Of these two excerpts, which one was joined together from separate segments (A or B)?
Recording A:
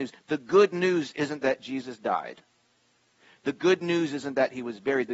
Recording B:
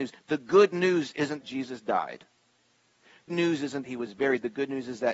B